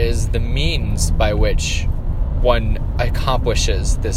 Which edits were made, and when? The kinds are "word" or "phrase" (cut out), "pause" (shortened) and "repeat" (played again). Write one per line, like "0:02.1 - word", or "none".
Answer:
none